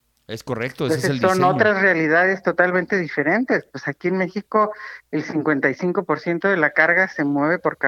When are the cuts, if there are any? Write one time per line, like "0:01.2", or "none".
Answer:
none